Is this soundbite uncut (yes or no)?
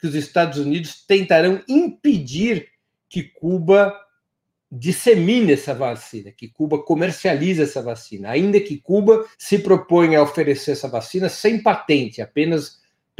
no